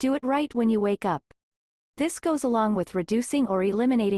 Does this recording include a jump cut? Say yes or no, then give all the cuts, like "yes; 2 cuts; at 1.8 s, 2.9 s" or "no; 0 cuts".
no; 0 cuts